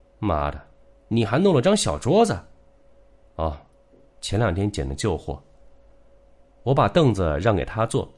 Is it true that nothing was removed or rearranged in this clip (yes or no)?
yes